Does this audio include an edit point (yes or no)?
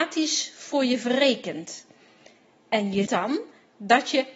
yes